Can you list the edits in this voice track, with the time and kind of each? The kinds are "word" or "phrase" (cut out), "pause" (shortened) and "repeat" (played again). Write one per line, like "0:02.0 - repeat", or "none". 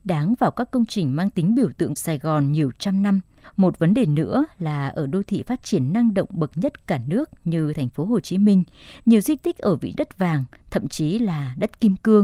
0:02.0 - word
0:03.4 - pause
0:09.9 - word

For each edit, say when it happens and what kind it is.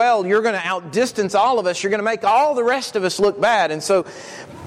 none

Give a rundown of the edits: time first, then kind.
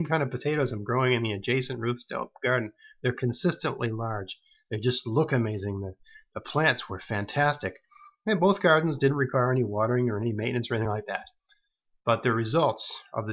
none

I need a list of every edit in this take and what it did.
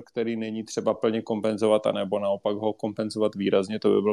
none

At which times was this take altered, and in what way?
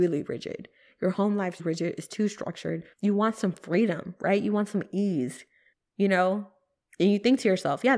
0:01.6 - word
0:02.9 - pause
0:05.7 - pause

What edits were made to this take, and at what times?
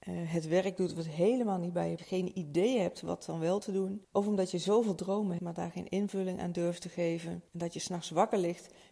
0:02.0 - phrase
0:05.4 - word

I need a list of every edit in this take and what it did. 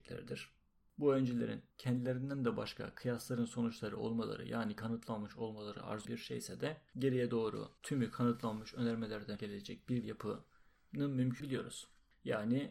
0:01.7 - pause
0:06.0 - word
0:06.9 - pause
0:07.8 - pause
0:09.4 - word
0:10.0 - word
0:11.4 - word

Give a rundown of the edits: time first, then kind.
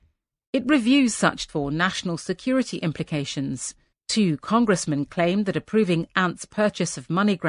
0:01.5 - word
0:03.9 - pause

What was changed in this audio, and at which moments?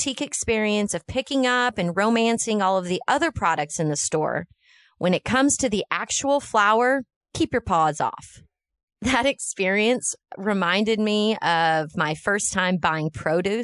none

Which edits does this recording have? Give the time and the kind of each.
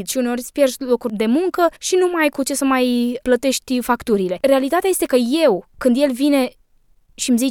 0:01.8 - pause
0:05.1 - word

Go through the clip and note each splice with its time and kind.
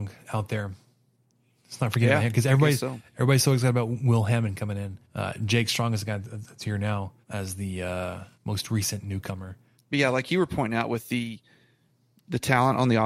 0:05.0 - pause
0:07.2 - pause
0:08.3 - pause
0:09.7 - pause

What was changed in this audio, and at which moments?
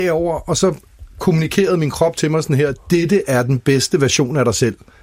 none

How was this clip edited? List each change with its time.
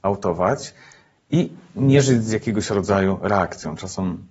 none

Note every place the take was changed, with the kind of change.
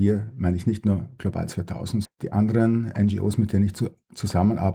0:02.0 - word

